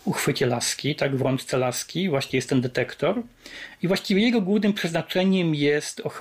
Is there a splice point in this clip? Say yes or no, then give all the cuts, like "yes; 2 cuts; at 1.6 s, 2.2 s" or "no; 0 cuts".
no; 0 cuts